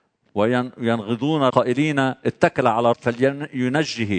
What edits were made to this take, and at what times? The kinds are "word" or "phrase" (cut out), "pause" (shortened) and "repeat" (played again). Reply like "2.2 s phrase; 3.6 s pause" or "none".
1.5 s word; 2.9 s word